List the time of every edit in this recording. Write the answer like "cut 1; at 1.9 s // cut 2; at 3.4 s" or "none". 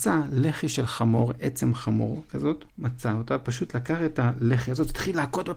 cut 1; at 2.7 s